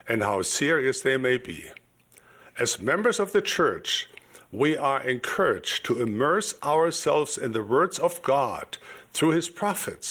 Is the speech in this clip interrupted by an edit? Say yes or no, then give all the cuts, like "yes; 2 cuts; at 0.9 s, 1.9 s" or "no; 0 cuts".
no; 0 cuts